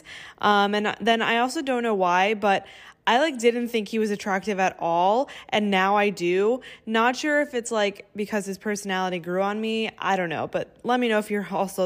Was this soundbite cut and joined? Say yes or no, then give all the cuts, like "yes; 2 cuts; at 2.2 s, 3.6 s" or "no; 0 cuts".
no; 0 cuts